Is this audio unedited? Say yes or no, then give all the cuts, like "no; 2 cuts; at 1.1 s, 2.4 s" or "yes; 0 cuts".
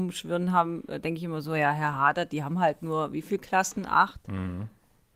yes; 0 cuts